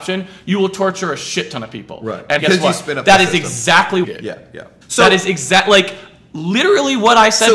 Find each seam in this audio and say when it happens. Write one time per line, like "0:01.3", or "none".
0:02.4
0:04.0
0:04.8